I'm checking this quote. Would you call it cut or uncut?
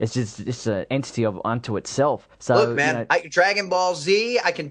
cut